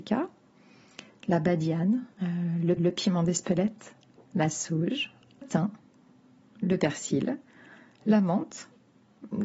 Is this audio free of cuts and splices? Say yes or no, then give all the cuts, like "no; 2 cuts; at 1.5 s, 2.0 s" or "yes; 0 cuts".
no; 3 cuts; at 2.1 s, 2.8 s, 5.4 s